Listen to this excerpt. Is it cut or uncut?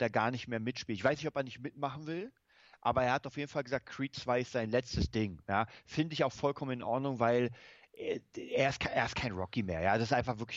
uncut